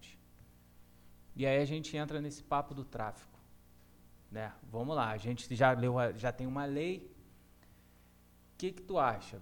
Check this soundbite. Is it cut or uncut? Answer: uncut